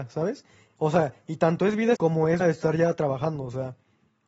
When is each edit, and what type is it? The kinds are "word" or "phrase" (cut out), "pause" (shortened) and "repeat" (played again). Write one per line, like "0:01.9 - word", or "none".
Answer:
0:02.0 - word
0:02.4 - word